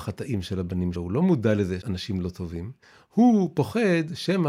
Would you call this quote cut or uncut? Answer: cut